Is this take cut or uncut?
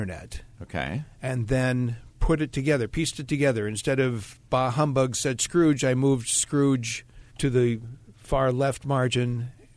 cut